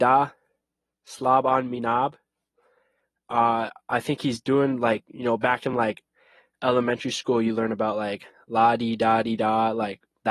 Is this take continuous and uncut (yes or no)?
yes